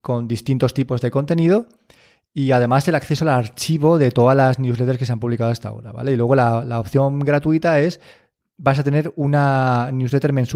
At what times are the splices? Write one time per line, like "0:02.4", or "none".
none